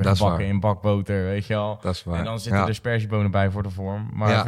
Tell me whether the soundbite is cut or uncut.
uncut